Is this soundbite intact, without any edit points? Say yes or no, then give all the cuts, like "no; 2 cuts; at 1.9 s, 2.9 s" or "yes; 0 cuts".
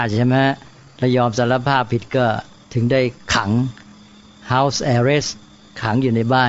yes; 0 cuts